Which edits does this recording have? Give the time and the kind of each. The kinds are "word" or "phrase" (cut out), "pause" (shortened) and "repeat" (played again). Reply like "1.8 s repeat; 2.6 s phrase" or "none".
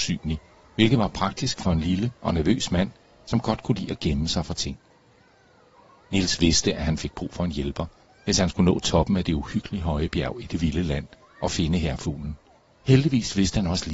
none